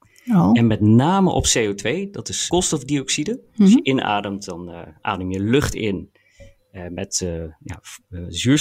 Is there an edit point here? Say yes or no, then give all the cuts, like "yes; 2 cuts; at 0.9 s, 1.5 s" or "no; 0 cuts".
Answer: yes; 1 cut; at 2.5 s